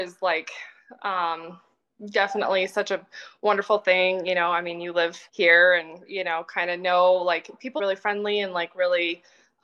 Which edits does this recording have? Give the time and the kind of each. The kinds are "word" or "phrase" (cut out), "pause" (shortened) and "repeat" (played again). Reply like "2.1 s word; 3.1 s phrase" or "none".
5.3 s pause; 7.8 s phrase